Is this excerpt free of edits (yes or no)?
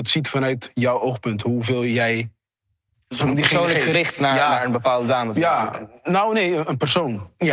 yes